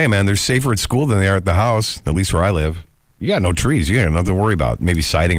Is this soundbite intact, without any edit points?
yes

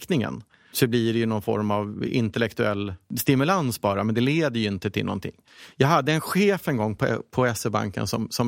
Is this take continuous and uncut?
yes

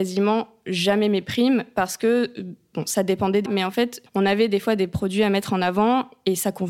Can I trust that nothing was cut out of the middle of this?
no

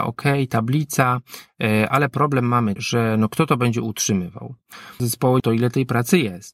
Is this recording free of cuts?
no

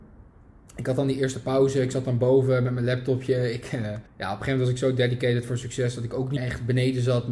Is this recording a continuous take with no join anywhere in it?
no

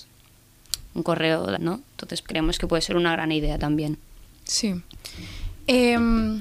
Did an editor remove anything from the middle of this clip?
yes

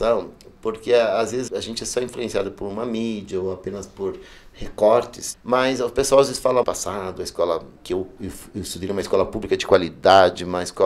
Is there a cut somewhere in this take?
yes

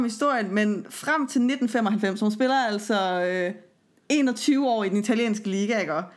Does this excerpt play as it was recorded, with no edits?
yes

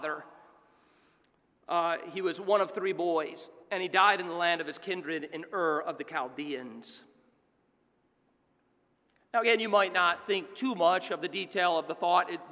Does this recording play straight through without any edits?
no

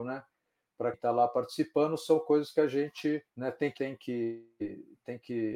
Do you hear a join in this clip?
yes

